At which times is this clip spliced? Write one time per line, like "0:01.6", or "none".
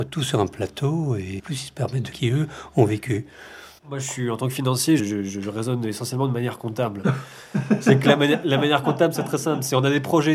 0:01.4
0:02.1
0:03.8
0:05.0